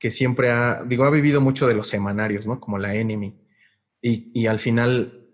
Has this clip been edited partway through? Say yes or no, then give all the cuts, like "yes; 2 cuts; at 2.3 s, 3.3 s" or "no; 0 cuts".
no; 0 cuts